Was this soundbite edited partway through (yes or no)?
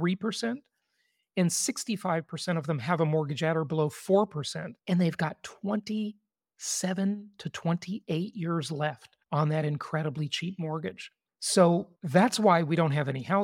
yes